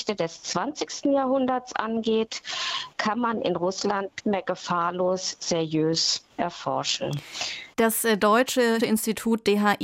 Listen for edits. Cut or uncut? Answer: cut